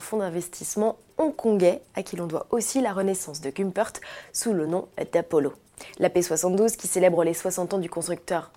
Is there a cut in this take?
no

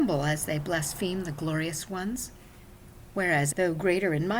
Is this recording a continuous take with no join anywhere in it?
no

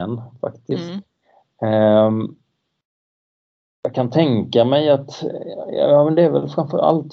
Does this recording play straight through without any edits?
no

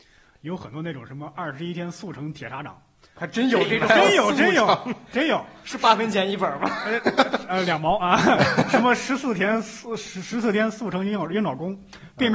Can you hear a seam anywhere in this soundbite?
yes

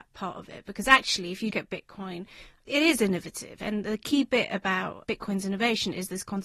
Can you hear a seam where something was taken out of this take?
yes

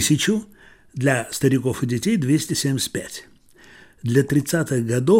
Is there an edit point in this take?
no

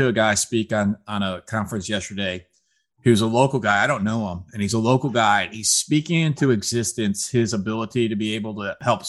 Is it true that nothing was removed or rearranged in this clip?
yes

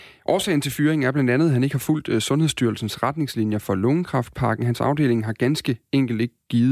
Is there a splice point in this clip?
no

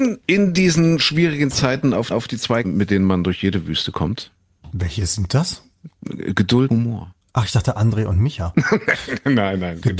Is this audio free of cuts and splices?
no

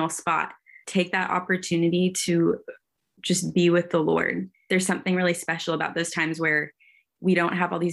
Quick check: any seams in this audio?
no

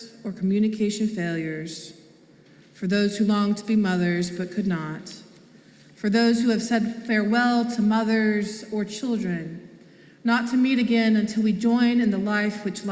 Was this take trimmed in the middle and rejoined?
no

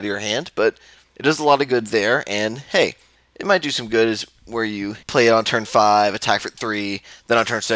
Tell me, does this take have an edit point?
yes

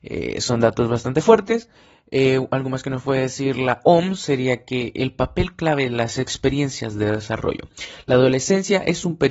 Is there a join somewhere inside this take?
no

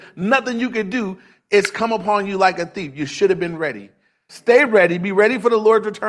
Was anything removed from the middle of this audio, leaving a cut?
no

